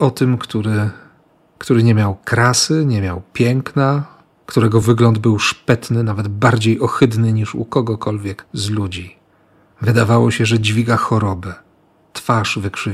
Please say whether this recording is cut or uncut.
uncut